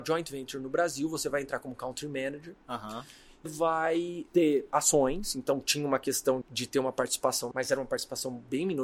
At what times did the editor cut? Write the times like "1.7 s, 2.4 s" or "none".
3.5 s, 6.4 s, 7.5 s